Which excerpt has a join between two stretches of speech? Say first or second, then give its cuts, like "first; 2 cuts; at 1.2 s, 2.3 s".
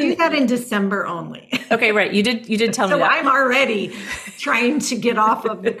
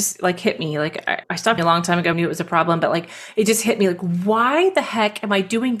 second; 3 cuts; at 1.2 s, 1.6 s, 2.1 s